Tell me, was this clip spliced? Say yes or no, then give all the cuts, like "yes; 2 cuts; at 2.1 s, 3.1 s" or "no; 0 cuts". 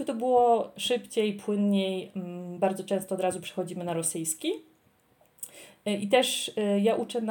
no; 0 cuts